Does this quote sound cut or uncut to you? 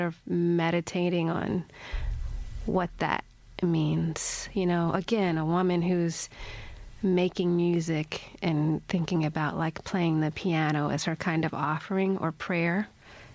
uncut